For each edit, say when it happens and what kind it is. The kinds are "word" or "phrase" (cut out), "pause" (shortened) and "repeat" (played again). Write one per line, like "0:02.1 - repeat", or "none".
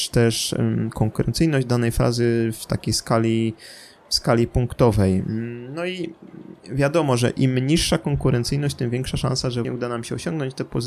0:06.6 - pause
0:09.6 - word